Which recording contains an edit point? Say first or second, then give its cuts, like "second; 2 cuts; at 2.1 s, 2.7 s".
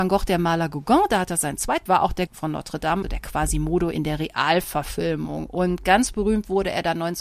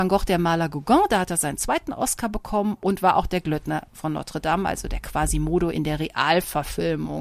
first; 3 cuts; at 1.9 s, 2.3 s, 3.0 s